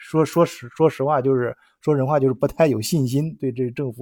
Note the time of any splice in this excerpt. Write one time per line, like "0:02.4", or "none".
none

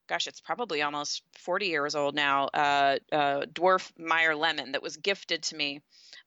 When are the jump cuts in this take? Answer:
0:03.0

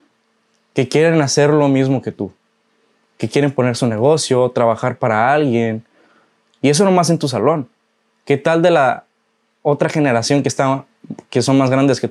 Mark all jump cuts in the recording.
none

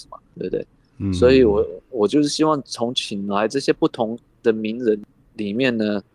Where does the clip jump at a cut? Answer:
none

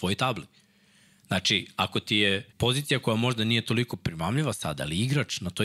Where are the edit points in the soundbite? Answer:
0:02.5

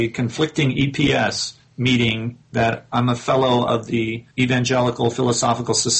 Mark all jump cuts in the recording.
0:04.3

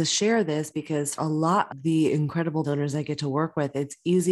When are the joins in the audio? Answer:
0:01.2
0:01.7
0:02.6

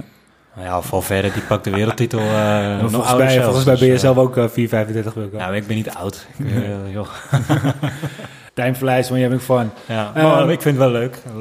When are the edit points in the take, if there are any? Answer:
0:08.5

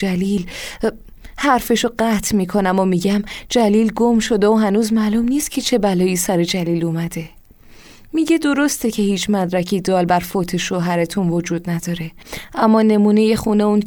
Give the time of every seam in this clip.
none

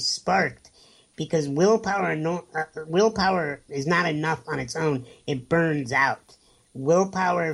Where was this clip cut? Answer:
0:03.7

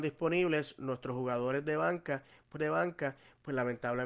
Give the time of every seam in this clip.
0:02.6

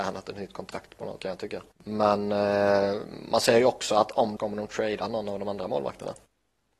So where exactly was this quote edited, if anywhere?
0:01.2
0:01.7
0:04.4

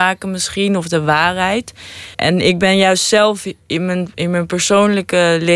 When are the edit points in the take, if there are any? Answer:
0:02.1

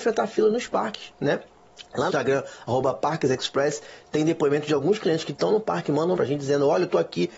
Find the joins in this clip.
0:02.1
0:06.2

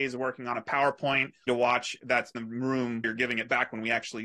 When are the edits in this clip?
0:01.5
0:02.0
0:02.3
0:03.0

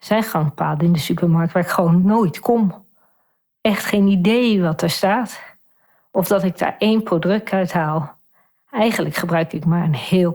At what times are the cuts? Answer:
none

